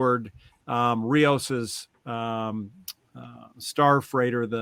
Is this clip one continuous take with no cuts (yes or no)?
yes